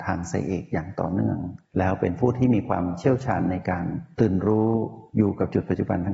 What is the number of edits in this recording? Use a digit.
1